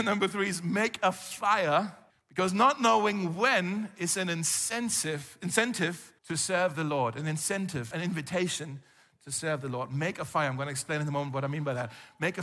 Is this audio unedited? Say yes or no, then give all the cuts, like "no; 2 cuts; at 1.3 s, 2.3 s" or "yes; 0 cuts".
no; 3 cuts; at 2.1 s, 6.2 s, 7.9 s